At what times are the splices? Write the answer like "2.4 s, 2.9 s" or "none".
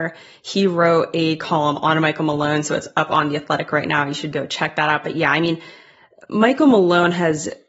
4.3 s